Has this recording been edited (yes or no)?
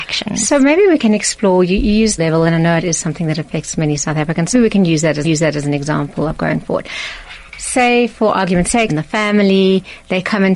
yes